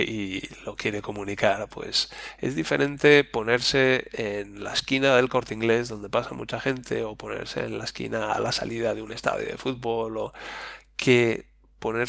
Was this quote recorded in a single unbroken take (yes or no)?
yes